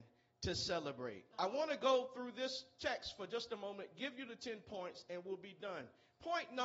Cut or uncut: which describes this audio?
cut